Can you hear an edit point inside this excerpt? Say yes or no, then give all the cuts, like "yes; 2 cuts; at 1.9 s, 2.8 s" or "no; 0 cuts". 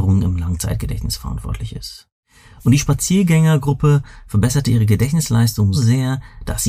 yes; 1 cut; at 5.7 s